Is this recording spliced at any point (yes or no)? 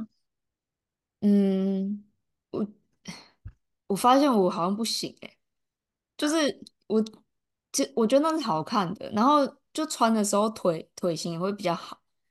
no